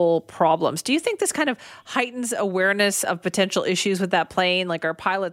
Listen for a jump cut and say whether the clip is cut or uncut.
uncut